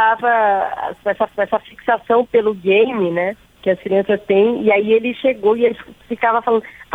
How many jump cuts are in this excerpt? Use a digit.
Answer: 1